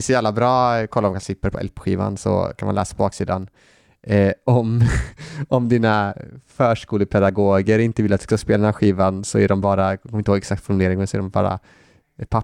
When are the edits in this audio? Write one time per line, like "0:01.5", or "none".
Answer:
none